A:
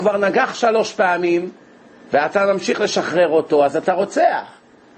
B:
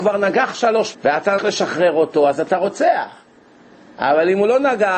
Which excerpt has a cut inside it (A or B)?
B